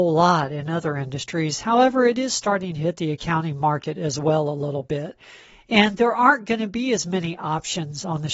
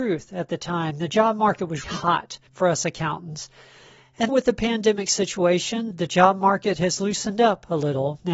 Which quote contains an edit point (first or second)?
second